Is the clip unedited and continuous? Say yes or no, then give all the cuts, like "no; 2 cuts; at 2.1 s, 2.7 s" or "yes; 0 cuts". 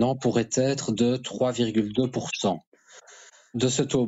yes; 0 cuts